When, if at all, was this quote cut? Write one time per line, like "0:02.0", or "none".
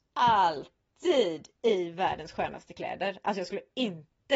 none